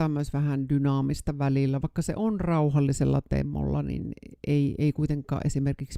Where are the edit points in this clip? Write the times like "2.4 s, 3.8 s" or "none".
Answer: 4.4 s